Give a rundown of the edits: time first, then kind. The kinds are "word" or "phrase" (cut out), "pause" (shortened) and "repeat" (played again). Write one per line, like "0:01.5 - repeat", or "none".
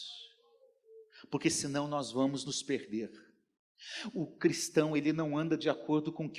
none

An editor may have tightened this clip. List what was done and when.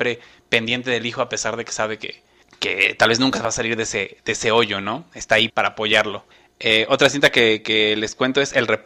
0:02.4 - pause
0:05.5 - word
0:06.3 - pause

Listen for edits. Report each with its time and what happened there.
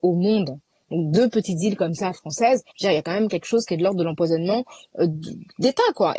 0:02.7 - pause

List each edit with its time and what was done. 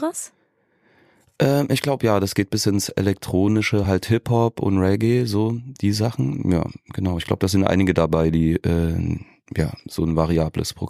none

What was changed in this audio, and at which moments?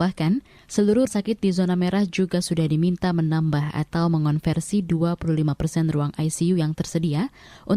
0:01.1 - word

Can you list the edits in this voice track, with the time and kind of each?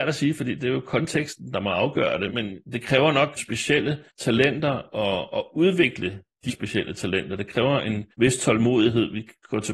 0:02.3 - word
0:02.6 - pause
0:03.4 - word
0:04.1 - pause
0:06.5 - word
0:08.1 - pause

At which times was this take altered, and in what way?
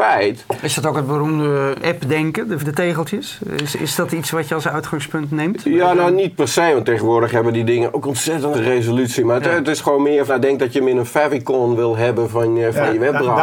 0:01.8 - word
0:02.6 - word
0:08.5 - word
0:10.3 - word

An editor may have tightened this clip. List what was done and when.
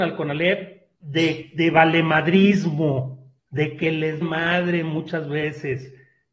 0:00.9 - pause
0:03.4 - pause
0:04.2 - word

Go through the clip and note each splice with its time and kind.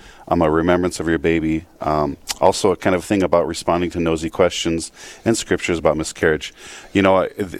none

